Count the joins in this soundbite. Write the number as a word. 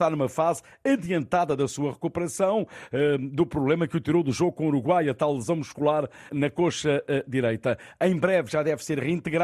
one